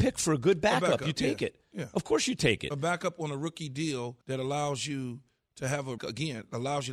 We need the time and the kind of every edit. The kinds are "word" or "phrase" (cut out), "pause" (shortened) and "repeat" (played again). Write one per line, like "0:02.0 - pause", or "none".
0:04.2 - pause
0:06.0 - word